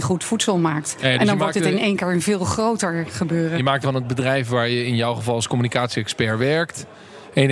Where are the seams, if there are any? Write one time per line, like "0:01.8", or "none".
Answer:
0:03.8